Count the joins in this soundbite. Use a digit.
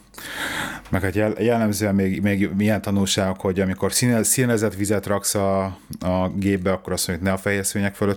0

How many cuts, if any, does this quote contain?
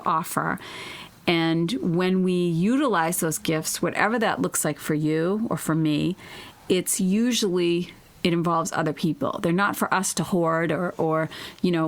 0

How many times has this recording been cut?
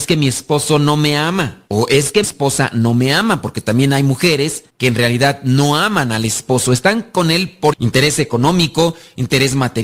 4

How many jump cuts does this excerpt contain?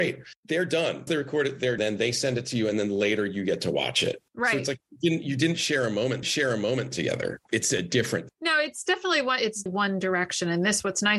6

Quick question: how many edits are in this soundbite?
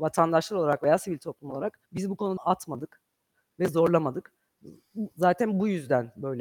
2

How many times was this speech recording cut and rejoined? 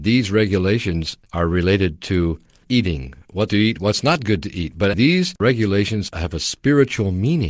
4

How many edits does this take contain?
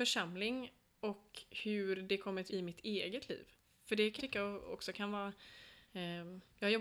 4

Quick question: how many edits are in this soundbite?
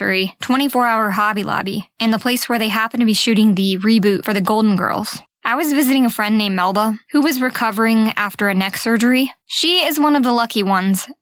0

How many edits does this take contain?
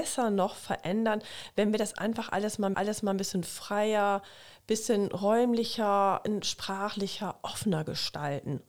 1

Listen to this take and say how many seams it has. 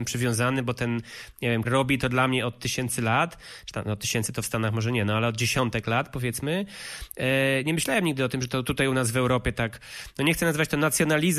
1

